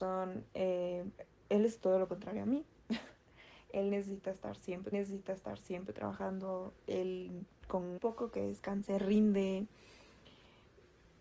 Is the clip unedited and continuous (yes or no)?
no